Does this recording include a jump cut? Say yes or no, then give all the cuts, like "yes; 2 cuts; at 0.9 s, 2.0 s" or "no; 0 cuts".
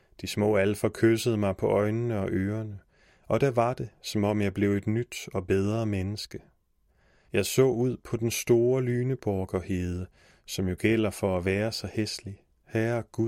no; 0 cuts